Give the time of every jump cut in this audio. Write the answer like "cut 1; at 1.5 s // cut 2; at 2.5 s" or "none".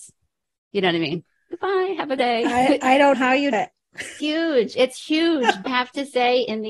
cut 1; at 2.2 s // cut 2; at 3.1 s // cut 3; at 3.5 s // cut 4; at 4.2 s // cut 5; at 5.7 s